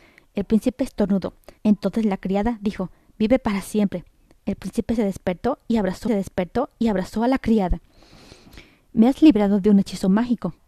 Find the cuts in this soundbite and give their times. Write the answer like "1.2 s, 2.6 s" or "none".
1.6 s, 3.1 s, 6.1 s